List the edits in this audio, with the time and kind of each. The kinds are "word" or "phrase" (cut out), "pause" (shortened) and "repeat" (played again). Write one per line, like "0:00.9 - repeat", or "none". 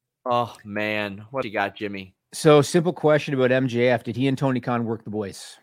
0:01.4 - word

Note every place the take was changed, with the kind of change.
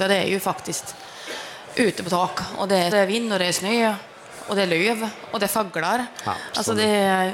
0:02.9 - phrase

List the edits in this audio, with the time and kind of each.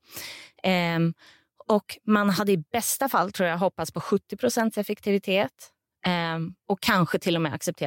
none

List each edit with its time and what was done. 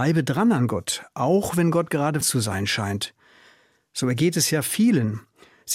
0:02.2 - word

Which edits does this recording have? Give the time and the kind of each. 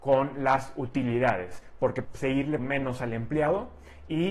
0:02.0 - word
0:02.6 - word

